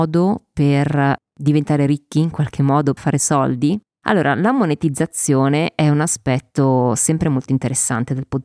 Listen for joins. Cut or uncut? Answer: cut